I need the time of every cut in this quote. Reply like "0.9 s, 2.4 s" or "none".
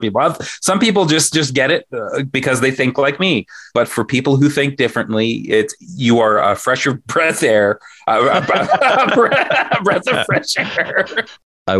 none